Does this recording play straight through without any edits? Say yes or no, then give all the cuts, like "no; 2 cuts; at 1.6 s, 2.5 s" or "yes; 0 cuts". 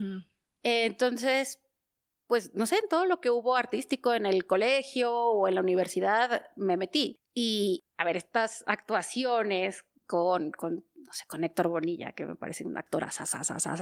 yes; 0 cuts